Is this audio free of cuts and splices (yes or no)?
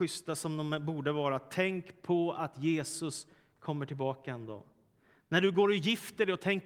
yes